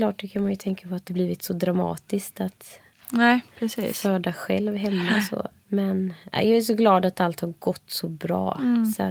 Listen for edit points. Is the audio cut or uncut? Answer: cut